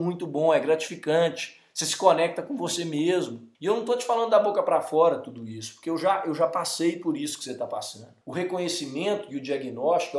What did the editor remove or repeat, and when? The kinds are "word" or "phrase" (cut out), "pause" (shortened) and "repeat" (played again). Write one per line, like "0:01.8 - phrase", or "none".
0:03.5 - pause
0:08.2 - pause